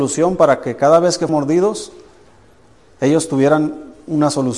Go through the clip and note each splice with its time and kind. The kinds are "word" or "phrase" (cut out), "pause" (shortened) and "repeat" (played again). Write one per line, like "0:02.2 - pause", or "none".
0:01.3 - word